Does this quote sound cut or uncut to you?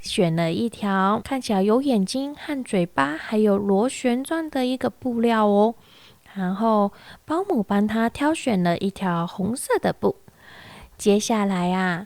cut